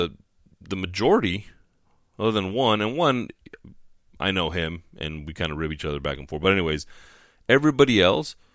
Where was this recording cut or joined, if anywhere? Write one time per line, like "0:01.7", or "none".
none